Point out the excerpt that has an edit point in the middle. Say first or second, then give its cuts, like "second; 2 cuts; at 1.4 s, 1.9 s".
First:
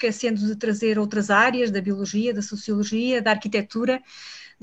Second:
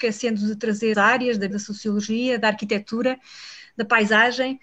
second; 2 cuts; at 0.9 s, 1.5 s